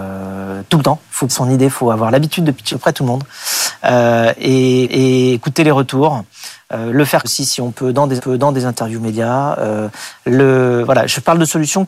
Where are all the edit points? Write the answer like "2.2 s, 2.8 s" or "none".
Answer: 1.3 s, 2.7 s, 4.8 s, 7.2 s, 8.2 s